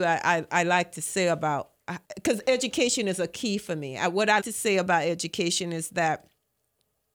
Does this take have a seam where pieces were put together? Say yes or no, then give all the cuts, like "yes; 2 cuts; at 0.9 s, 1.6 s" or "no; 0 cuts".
yes; 2 cuts; at 2.0 s, 4.4 s